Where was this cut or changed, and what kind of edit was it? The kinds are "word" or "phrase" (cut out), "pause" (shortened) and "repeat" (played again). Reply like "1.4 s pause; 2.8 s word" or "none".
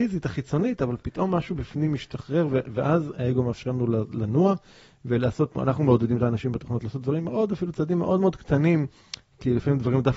5.6 s word